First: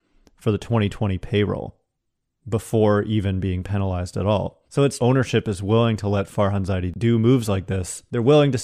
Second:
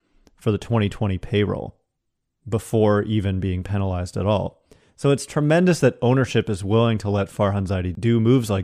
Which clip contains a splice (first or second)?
first